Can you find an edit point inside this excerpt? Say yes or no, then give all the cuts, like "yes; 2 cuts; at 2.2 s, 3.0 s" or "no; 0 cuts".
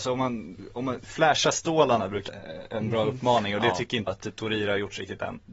yes; 2 cuts; at 2.3 s, 4.1 s